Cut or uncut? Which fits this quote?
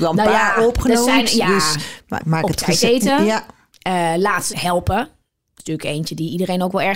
cut